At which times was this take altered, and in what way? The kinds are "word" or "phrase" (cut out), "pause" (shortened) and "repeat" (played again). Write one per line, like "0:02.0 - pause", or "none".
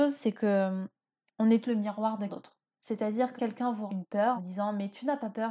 0:01.6 - word
0:02.3 - word
0:03.4 - word
0:03.9 - word
0:04.4 - word